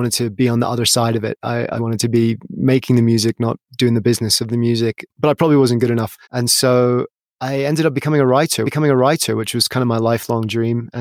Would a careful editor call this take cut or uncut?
cut